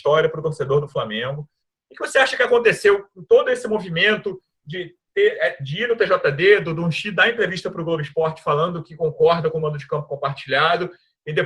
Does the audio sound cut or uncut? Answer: uncut